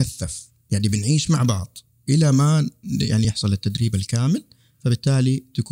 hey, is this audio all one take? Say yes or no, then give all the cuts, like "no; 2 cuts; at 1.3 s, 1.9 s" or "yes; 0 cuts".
yes; 0 cuts